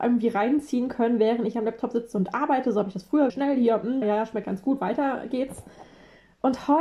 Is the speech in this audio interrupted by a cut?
yes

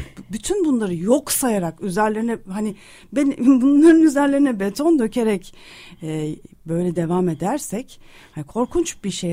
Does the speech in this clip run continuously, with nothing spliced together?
yes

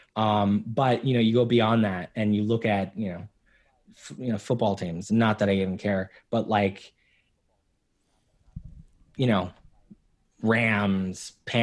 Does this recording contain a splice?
no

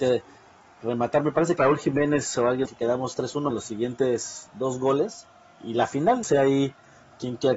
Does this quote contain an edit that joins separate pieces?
yes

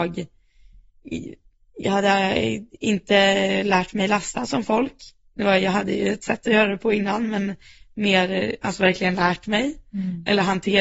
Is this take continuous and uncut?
yes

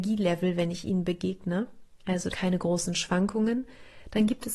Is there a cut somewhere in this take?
yes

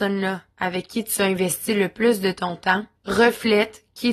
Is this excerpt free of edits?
no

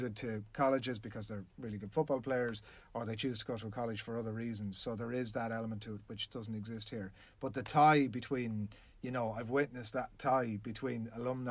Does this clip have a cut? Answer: no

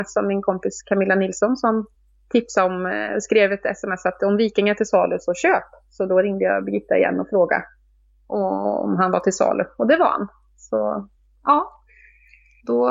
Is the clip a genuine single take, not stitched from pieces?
yes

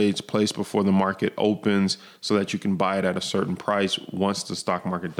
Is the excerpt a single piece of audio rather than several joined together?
yes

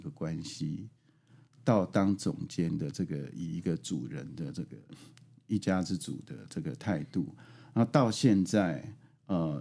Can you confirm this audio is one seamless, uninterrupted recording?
yes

